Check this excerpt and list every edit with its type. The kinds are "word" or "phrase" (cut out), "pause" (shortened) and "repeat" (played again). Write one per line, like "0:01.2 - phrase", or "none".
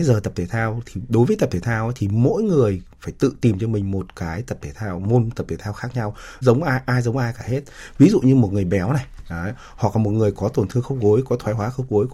0:06.4 - phrase